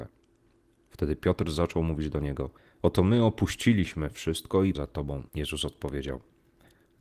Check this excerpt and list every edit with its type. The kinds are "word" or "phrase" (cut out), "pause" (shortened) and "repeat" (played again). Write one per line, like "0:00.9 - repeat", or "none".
0:02.6 - pause
0:04.8 - word
0:05.3 - pause